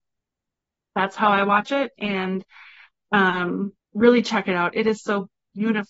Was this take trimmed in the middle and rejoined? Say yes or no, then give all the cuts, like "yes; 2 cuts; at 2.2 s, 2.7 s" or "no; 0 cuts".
yes; 1 cut; at 3.8 s